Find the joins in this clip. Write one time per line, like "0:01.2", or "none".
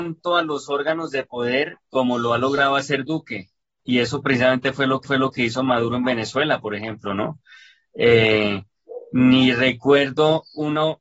0:05.0